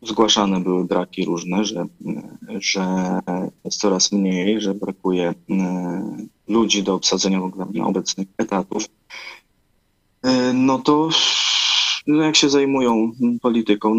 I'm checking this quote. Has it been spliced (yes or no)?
yes